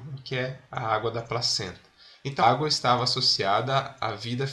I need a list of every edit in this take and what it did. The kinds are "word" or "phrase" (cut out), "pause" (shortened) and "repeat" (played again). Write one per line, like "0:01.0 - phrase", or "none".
0:02.4 - word